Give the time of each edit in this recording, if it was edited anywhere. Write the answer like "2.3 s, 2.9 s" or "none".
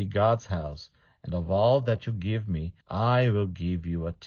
2.8 s